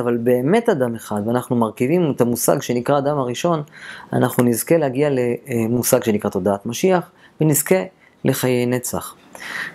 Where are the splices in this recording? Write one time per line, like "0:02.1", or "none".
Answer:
none